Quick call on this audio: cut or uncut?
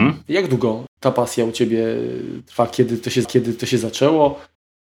cut